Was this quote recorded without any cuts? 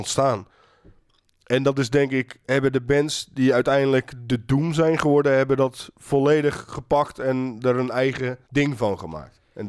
no; 2 cuts; at 2.4 s, 8.4 s

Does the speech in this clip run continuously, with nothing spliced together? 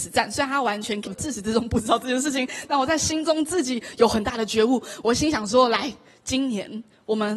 no; 1 cut; at 1.1 s

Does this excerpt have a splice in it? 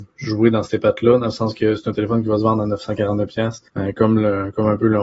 yes; 1 cut; at 3.7 s

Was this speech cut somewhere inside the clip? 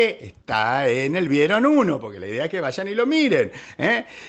no; 0 cuts

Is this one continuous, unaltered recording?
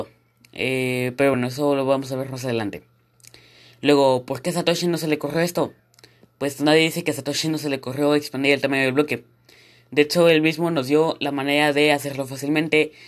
yes; 0 cuts

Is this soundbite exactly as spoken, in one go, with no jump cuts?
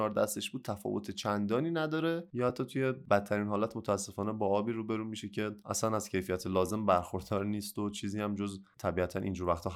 yes; 0 cuts

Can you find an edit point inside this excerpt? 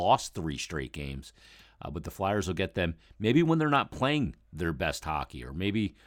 no; 0 cuts

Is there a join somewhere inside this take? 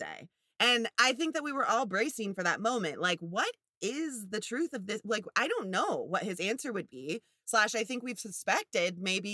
no; 0 cuts

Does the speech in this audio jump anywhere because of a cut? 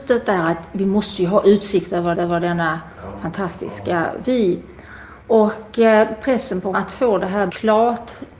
yes; 4 cuts; at 2.1 s, 5.2 s, 6.7 s, 7.5 s

